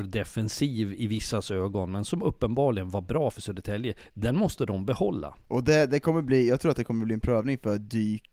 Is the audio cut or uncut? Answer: cut